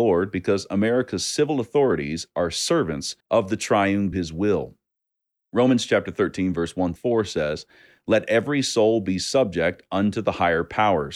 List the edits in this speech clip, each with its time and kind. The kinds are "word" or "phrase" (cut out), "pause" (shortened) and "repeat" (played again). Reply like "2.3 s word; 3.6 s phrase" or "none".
3.2 s pause; 4.1 s phrase; 7.0 s word